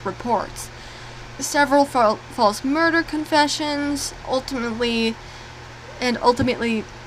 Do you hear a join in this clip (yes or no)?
yes